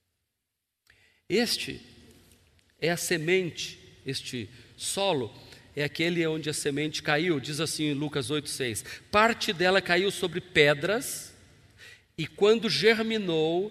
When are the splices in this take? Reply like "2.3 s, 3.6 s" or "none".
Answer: none